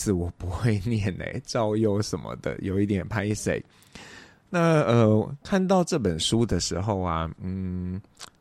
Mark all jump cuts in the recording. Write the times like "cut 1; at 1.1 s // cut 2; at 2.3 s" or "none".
none